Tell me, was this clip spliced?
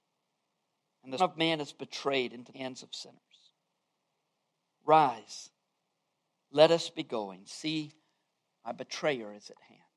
yes; 2 cuts; at 1.2 s, 2.5 s

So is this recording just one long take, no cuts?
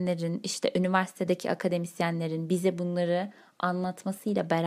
yes; 0 cuts

